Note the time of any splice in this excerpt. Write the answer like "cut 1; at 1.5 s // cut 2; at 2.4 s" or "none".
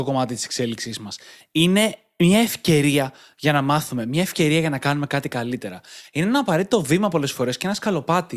none